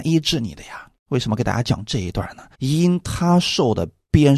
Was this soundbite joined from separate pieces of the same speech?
yes; 2 cuts; at 1.0 s, 2.5 s

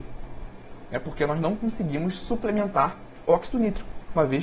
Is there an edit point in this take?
no; 0 cuts

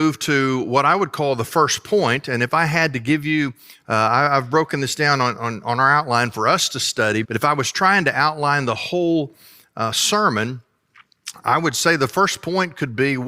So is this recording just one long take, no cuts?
no; 1 cut; at 7.2 s

